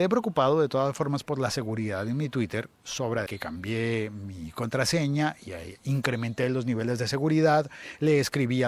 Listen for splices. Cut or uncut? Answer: cut